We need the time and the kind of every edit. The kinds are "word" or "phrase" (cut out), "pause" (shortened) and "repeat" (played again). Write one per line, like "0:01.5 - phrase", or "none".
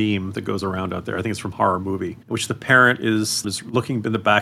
0:01.5 - word
0:02.2 - pause
0:03.4 - word